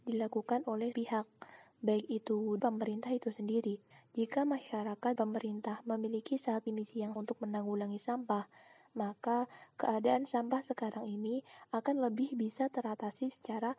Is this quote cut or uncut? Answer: cut